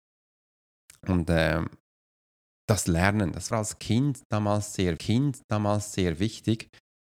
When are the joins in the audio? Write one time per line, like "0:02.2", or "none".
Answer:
0:03.5
0:05.0